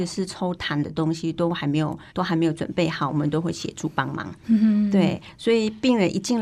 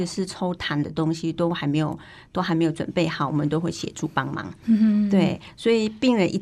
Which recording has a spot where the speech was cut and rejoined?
first; 1 cut; at 2.1 s

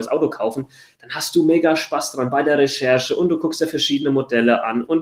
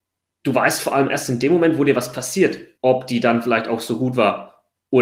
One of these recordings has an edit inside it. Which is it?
second; 1 cut; at 2.7 s

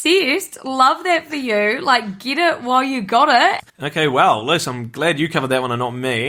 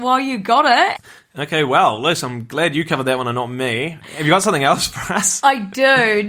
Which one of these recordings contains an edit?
first; 1 cut; at 3.7 s

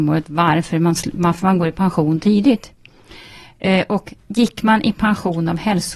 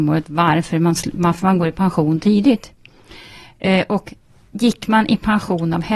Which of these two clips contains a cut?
first; 1 cut; at 4.2 s

